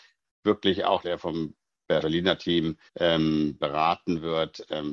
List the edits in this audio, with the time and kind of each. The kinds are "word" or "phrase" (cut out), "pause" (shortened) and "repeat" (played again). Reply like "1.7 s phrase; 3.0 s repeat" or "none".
1.0 s phrase; 2.0 s word; 2.9 s pause